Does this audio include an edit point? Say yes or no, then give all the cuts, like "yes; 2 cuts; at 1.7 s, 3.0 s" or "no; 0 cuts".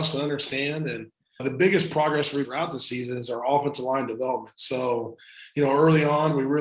yes; 2 cuts; at 1.4 s, 2.4 s